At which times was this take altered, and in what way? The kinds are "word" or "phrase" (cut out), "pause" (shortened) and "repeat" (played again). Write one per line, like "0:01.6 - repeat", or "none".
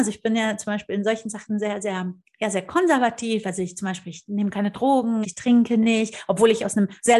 0:05.2 - phrase